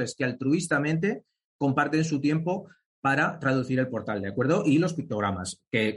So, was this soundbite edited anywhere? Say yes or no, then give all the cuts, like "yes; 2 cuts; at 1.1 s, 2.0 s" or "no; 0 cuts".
no; 0 cuts